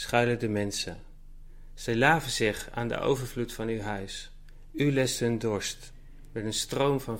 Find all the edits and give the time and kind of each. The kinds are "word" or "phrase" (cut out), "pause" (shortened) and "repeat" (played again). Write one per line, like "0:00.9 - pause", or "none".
none